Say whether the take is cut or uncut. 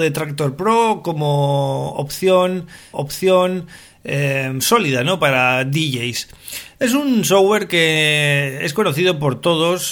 cut